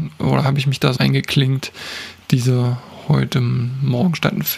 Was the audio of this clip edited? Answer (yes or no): yes